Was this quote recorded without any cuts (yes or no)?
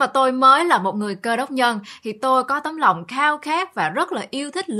yes